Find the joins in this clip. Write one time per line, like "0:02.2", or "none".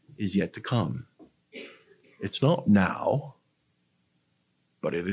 none